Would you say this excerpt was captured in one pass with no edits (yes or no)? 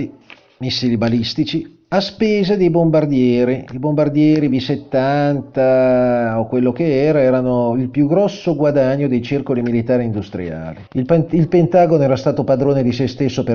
no